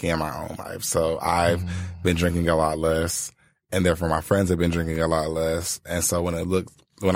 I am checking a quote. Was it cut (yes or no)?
no